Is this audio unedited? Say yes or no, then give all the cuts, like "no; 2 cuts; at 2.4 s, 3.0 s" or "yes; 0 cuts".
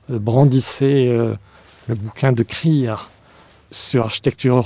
yes; 0 cuts